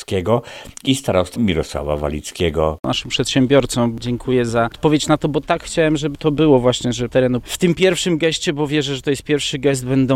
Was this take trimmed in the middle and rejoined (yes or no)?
yes